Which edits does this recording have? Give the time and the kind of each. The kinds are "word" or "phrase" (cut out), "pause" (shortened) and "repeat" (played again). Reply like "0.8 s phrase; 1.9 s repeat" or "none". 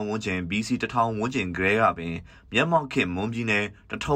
none